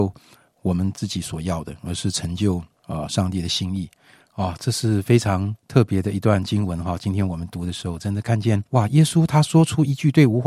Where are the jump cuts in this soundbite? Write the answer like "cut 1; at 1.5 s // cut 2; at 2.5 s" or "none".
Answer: cut 1; at 5.6 s // cut 2; at 8.7 s